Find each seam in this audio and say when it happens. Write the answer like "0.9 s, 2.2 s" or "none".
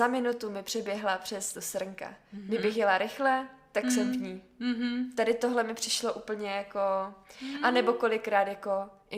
1.5 s